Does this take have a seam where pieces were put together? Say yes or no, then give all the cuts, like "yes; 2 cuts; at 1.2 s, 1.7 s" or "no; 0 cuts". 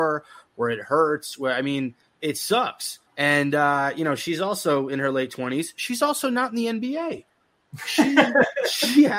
yes; 1 cut; at 3.1 s